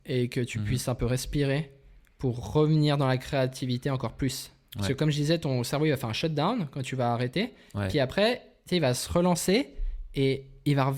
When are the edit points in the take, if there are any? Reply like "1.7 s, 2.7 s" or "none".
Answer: none